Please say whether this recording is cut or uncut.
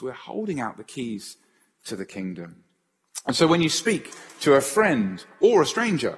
uncut